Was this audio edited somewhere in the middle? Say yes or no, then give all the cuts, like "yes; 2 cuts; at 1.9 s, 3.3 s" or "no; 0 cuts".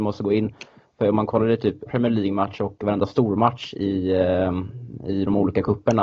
yes; 1 cut; at 1.9 s